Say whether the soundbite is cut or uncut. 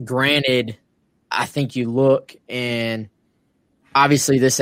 uncut